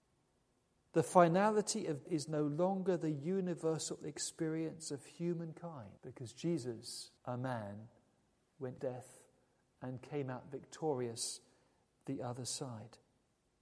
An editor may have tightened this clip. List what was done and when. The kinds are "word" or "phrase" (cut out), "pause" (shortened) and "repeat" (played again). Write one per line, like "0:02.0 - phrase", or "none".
0:02.1 - word
0:06.0 - pause
0:07.2 - pause
0:08.8 - word